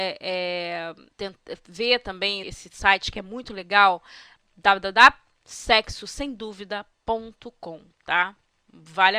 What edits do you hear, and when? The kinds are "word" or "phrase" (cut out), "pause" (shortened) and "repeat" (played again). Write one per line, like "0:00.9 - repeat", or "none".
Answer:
0:01.1 - pause
0:02.4 - word
0:07.9 - pause

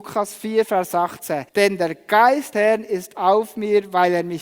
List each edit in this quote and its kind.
0:01.5 - pause
0:02.5 - word

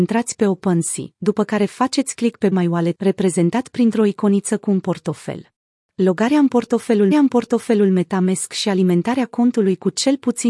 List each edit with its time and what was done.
0:02.5 - word
0:02.9 - phrase
0:05.5 - pause
0:07.1 - repeat

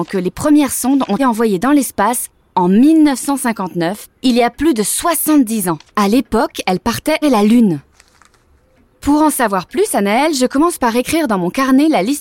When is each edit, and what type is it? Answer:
0:01.2 - word
0:04.2 - pause
0:05.9 - pause
0:07.2 - word

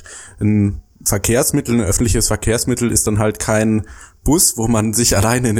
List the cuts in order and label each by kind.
none

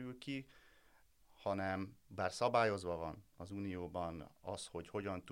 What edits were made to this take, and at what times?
0:03.3 - pause

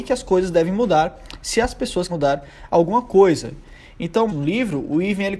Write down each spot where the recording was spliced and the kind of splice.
0:02.1 - word
0:04.3 - phrase

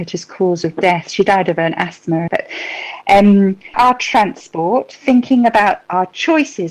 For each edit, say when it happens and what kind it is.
0:02.3 - word
0:03.7 - phrase

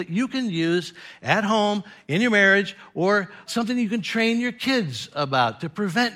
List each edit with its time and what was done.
0:03.5 - word

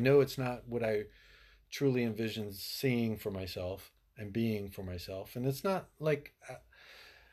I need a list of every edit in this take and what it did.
none

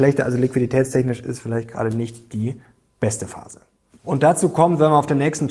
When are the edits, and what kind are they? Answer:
none

